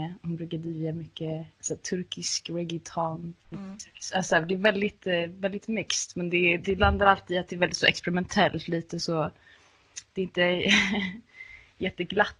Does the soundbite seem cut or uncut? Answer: cut